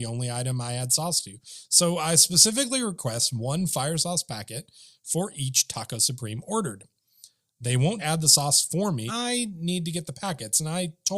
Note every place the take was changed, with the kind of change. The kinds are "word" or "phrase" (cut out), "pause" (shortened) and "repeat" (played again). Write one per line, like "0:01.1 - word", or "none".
0:08.0 - word
0:09.1 - word